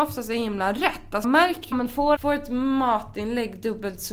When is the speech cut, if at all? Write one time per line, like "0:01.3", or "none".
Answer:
0:01.2
0:01.7
0:02.2